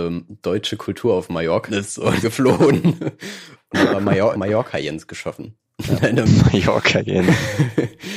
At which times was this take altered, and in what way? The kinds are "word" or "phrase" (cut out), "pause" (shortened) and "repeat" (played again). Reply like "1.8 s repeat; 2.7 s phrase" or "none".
1.7 s word; 2.2 s phrase; 4.3 s phrase